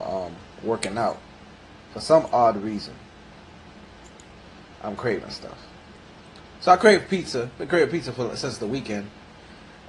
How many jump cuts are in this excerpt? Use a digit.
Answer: 0